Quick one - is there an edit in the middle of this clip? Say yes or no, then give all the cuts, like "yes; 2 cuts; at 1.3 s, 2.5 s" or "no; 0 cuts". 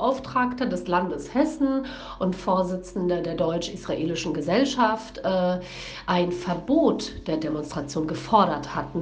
no; 0 cuts